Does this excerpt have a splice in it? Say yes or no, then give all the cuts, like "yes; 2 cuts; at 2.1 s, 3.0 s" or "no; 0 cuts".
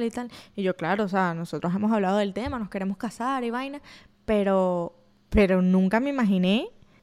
no; 0 cuts